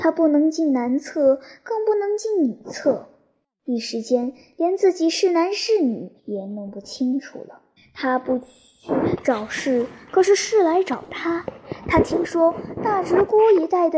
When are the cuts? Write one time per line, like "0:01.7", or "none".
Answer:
0:06.2
0:07.8